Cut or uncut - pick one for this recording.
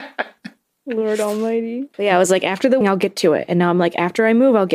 cut